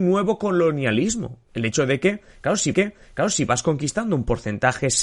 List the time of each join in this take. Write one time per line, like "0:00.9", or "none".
0:01.4
0:02.7